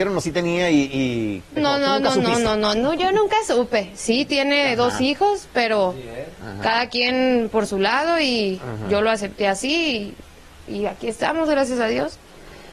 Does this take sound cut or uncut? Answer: cut